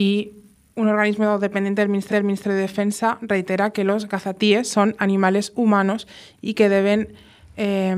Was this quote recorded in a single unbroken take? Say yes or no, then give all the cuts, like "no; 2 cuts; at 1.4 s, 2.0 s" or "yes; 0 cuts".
no; 1 cut; at 2.1 s